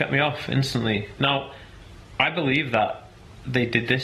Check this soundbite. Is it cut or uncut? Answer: uncut